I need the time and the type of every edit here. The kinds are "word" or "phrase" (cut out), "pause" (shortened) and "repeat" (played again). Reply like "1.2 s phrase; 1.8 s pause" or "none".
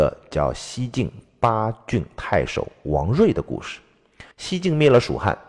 4.3 s pause